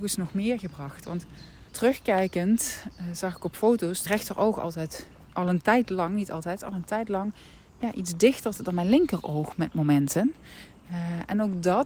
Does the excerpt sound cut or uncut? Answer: cut